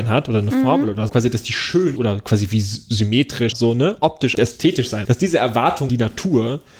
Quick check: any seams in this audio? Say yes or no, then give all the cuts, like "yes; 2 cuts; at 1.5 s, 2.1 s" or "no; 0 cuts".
yes; 6 cuts; at 1.1 s, 2.0 s, 3.5 s, 4.3 s, 5.0 s, 5.9 s